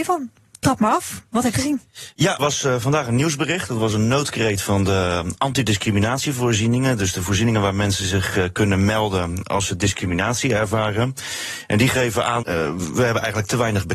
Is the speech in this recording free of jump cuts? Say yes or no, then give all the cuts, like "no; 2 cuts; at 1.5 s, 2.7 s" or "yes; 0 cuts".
no; 3 cuts; at 1.5 s, 2.4 s, 12.4 s